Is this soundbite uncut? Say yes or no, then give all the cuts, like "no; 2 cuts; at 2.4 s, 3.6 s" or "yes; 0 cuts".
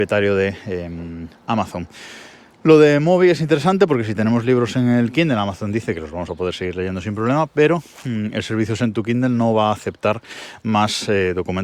yes; 0 cuts